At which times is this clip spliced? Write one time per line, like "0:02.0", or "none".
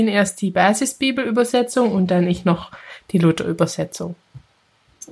none